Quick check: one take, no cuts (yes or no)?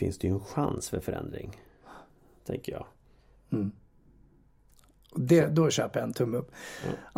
yes